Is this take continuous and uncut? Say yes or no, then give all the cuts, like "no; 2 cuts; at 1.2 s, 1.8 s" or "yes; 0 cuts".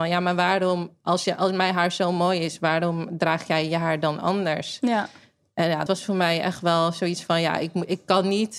no; 1 cut; at 5.9 s